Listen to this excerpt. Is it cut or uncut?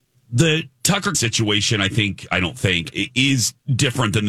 cut